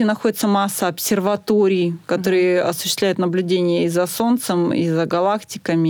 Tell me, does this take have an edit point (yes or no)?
no